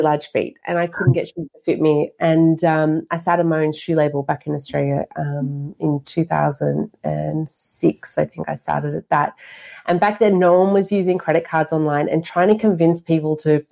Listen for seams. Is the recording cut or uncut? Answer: uncut